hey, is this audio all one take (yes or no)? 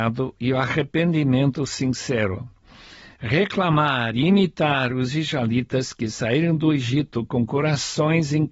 yes